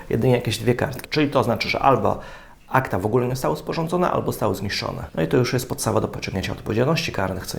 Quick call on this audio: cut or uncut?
uncut